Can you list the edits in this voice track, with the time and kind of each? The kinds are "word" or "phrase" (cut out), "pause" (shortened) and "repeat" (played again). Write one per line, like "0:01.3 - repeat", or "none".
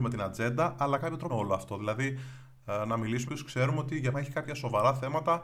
0:01.0 - word
0:01.3 - phrase
0:03.3 - phrase
0:04.1 - word